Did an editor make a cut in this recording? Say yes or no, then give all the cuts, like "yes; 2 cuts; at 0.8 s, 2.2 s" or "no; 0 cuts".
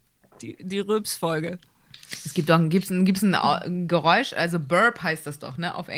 no; 0 cuts